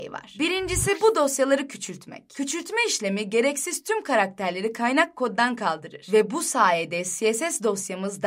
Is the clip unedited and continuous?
yes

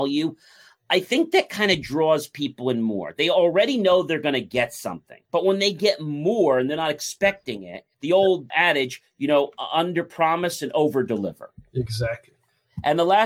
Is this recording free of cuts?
no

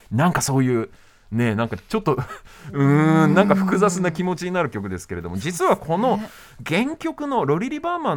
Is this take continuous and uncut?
yes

